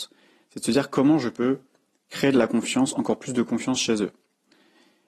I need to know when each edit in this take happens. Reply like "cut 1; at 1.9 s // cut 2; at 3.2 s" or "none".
none